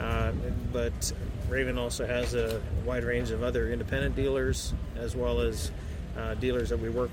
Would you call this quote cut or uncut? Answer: uncut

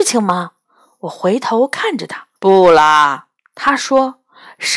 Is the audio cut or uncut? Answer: cut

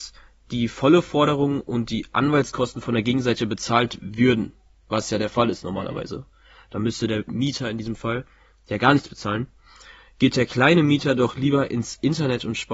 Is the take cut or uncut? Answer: uncut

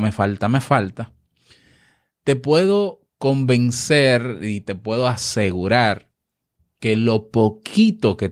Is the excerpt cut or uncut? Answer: uncut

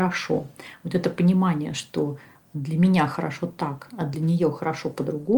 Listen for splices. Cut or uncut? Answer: uncut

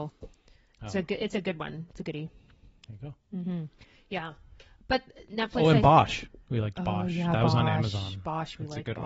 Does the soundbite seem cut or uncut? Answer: uncut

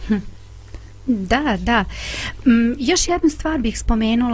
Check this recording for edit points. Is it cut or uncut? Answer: uncut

